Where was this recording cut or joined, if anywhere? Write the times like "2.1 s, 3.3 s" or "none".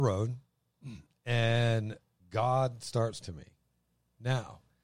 2.2 s, 3.2 s